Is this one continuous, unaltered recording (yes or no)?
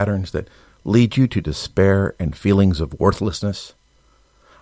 yes